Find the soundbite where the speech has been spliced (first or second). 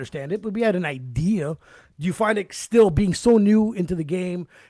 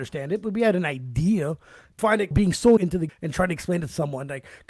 second